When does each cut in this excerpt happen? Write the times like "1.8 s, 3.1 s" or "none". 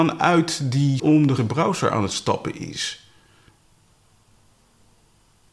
1.0 s, 1.4 s